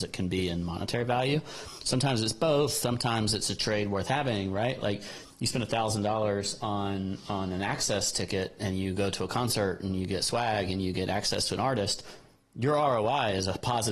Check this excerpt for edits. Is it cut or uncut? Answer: uncut